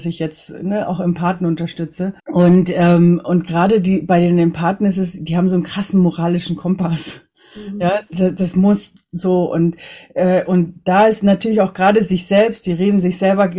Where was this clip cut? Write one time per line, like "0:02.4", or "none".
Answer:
0:02.2